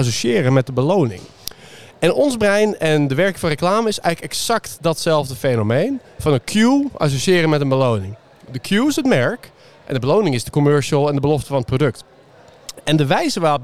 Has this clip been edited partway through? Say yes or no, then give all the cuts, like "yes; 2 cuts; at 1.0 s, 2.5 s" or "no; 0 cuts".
no; 0 cuts